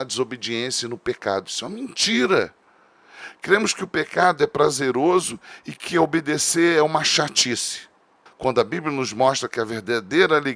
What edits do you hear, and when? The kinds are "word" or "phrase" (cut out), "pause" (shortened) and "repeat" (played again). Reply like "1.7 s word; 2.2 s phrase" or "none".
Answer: 8.3 s pause